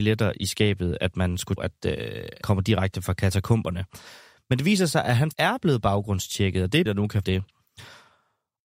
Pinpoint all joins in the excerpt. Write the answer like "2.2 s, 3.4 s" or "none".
1.6 s, 2.4 s, 5.3 s, 6.9 s, 7.2 s